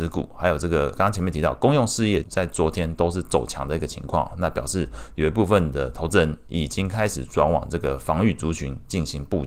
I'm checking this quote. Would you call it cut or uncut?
cut